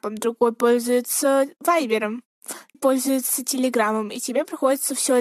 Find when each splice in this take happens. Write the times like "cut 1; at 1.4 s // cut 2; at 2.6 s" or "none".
cut 1; at 2.7 s